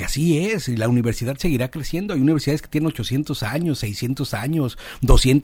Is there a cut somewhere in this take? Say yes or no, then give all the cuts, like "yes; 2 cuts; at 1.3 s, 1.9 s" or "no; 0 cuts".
no; 0 cuts